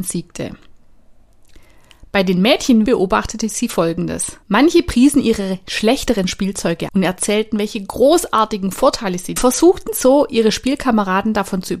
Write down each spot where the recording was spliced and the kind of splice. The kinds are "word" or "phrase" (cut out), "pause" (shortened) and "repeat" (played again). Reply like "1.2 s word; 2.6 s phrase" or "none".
2.9 s word; 4.4 s pause; 6.9 s word; 9.4 s phrase

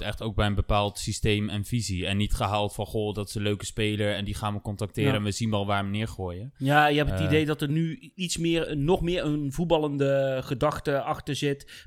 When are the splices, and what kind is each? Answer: 8.7 s word

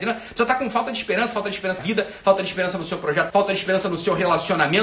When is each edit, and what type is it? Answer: 1.8 s word; 3.3 s word

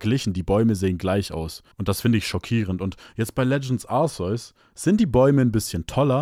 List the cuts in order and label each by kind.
1.7 s pause

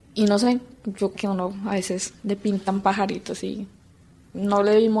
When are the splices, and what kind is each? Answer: 1.1 s phrase

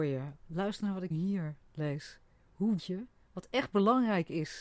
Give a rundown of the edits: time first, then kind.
1.1 s word; 2.8 s word

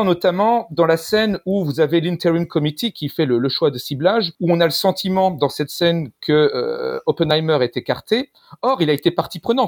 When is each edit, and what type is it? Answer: 4.3 s pause

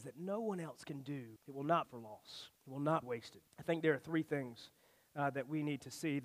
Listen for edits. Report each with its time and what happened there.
1.4 s pause; 1.8 s word; 2.6 s pause; 3.0 s word; 3.5 s pause

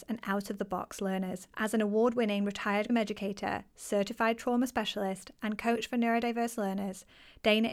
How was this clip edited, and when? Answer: 1.5 s pause; 2.9 s word

